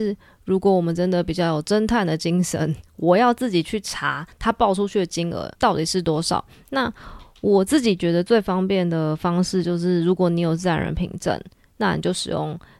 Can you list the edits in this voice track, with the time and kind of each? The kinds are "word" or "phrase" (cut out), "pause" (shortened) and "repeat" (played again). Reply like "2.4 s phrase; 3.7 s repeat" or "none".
5.5 s pause